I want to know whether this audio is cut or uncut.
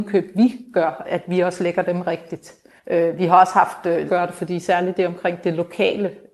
cut